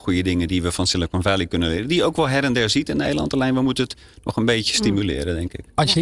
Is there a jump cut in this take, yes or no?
no